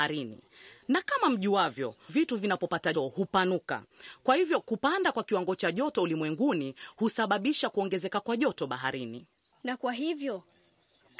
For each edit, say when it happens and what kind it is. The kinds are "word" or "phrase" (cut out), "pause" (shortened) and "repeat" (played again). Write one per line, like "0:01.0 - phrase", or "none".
0:02.1 - word
0:02.9 - word